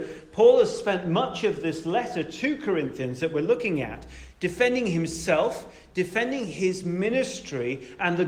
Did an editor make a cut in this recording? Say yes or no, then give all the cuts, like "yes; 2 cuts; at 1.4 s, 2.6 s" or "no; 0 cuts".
no; 0 cuts